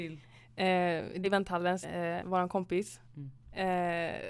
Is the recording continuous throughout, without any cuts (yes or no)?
no